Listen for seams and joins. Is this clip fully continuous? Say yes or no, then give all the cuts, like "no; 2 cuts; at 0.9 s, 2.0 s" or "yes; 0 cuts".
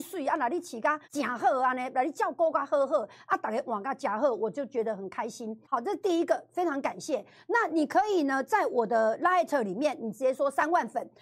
no; 2 cuts; at 1.0 s, 5.6 s